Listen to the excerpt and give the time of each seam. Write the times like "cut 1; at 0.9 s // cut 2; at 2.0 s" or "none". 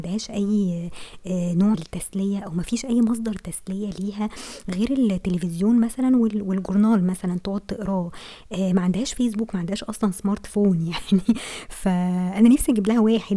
cut 1; at 1.7 s